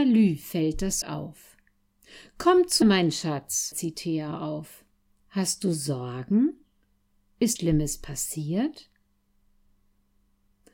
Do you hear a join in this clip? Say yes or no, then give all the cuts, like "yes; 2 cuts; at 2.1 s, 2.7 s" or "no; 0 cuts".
yes; 5 cuts; at 1.0 s, 2.8 s, 3.7 s, 4.9 s, 7.6 s